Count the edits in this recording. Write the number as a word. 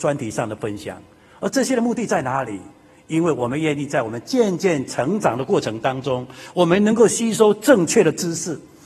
zero